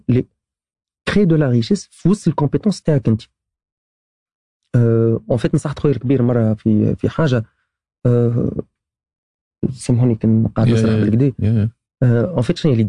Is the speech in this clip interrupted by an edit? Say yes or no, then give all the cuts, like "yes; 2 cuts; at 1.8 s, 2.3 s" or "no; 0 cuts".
no; 0 cuts